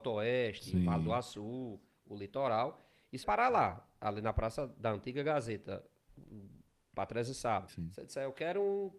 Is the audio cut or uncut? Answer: cut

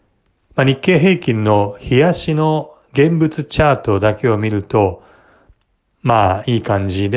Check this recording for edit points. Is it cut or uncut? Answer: uncut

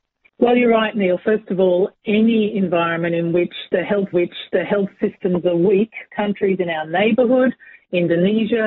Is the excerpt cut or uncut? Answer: cut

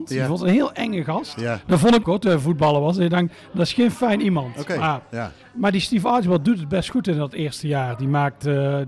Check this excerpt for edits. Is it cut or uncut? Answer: cut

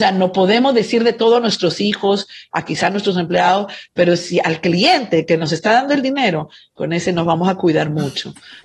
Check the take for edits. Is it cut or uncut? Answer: uncut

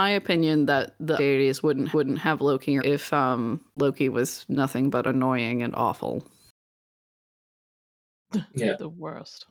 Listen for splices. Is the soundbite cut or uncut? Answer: cut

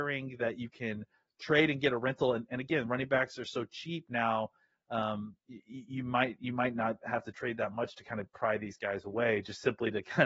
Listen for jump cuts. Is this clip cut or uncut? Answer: uncut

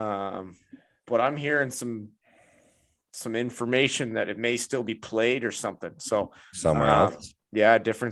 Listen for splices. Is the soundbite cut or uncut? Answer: uncut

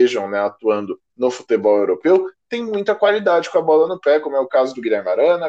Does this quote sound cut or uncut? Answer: cut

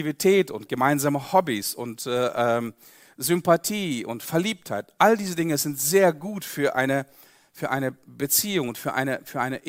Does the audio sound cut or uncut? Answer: uncut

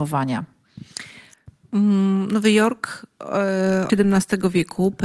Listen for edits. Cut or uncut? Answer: cut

